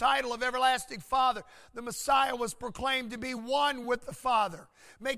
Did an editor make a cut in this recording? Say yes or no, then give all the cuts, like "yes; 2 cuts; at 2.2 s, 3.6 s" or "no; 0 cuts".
no; 0 cuts